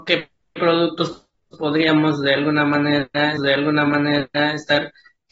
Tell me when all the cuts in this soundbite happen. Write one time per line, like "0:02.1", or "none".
0:03.4